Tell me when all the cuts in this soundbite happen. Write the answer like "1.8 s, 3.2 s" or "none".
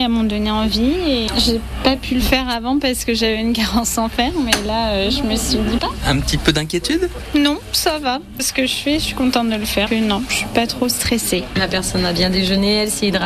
5.8 s, 8.4 s, 9.9 s